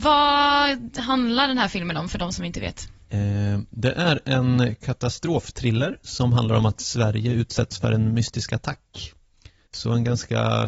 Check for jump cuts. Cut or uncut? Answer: uncut